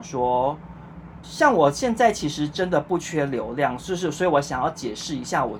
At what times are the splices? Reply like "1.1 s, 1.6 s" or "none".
1.2 s